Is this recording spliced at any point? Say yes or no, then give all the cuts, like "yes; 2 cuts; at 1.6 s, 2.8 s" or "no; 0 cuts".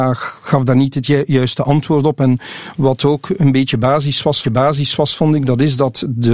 yes; 1 cut; at 4.4 s